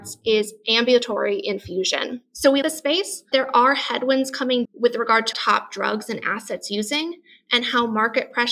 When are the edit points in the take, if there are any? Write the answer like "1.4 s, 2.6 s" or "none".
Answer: 2.6 s, 3.3 s, 4.6 s, 5.3 s